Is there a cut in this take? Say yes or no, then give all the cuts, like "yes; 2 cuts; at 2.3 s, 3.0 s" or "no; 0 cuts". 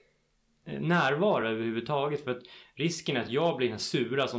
no; 0 cuts